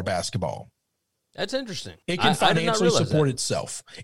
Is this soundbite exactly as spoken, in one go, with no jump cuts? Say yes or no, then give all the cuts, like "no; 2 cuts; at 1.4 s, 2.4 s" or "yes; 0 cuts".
no; 1 cut; at 2.0 s